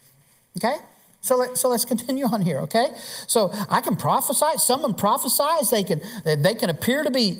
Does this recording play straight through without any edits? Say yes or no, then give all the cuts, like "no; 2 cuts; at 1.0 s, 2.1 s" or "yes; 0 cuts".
yes; 0 cuts